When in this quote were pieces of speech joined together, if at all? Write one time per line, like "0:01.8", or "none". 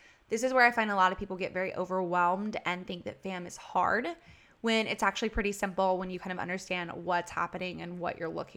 none